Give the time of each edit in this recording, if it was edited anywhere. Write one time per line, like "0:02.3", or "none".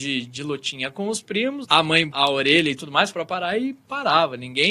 0:01.6
0:02.1
0:03.1